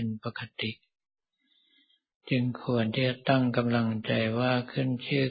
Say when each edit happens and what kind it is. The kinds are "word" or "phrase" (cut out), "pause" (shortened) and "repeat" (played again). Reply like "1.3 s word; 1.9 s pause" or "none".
none